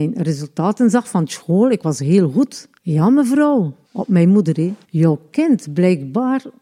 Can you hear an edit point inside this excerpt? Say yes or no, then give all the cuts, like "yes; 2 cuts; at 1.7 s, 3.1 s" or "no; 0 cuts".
yes; 3 cuts; at 2.8 s, 3.8 s, 4.8 s